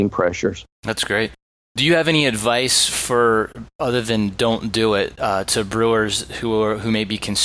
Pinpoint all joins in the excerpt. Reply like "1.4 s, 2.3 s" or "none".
none